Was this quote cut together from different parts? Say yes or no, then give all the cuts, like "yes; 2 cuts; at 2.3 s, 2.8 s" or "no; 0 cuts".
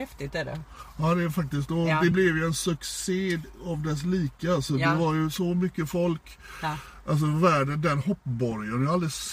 no; 0 cuts